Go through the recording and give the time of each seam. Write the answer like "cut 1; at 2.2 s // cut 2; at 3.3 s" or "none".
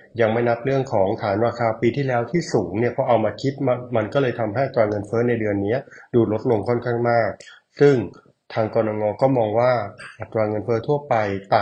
none